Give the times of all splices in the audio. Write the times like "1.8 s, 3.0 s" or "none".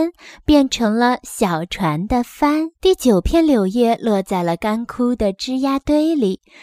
2.7 s